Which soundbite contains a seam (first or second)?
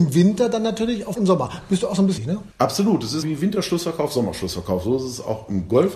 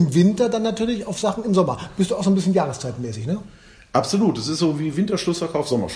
first